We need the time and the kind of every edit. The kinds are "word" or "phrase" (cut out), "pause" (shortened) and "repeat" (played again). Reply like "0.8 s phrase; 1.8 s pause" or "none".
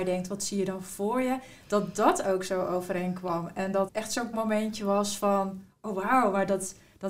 3.9 s word; 4.3 s word